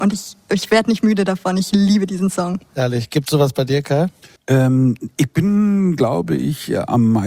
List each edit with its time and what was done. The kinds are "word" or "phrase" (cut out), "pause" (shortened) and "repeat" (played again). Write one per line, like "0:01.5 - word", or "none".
0:04.4 - pause